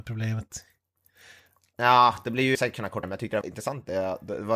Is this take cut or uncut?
cut